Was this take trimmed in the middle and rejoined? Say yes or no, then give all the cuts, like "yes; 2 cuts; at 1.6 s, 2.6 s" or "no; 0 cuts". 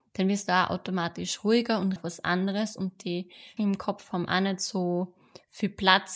yes; 2 cuts; at 2.0 s, 3.6 s